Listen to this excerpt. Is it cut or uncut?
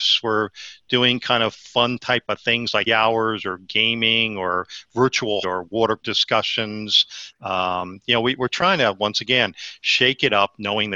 cut